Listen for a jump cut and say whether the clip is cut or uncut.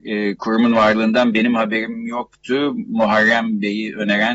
uncut